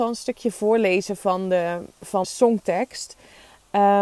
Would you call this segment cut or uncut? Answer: cut